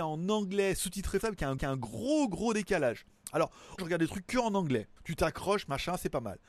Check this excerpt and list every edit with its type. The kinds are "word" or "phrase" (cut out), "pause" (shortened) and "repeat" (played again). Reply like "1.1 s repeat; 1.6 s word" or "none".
1.2 s word; 1.6 s repeat; 3.8 s phrase; 5.0 s pause